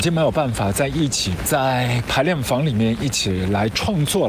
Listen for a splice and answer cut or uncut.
cut